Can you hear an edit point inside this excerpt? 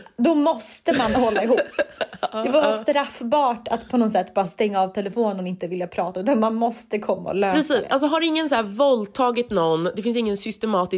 no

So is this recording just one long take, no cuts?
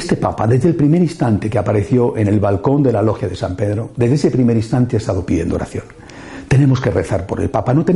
yes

